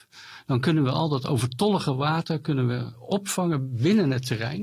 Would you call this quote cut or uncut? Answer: uncut